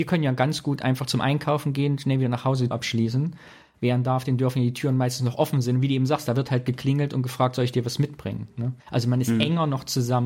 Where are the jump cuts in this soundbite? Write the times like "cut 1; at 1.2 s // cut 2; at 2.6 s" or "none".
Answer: cut 1; at 2.7 s // cut 2; at 8.8 s